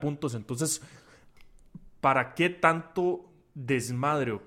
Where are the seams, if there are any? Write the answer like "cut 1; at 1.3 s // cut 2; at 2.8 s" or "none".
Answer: none